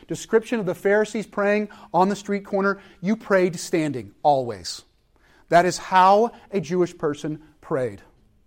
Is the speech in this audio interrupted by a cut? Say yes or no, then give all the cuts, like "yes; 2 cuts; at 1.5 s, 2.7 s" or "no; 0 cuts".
no; 0 cuts